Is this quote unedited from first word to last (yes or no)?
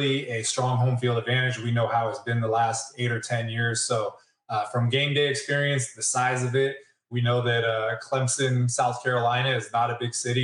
yes